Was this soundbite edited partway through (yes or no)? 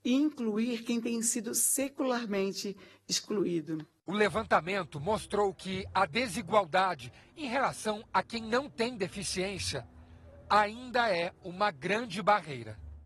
no